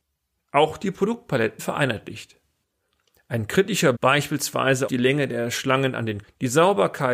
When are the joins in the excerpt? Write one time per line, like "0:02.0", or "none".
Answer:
0:01.6
0:03.9
0:04.9
0:06.2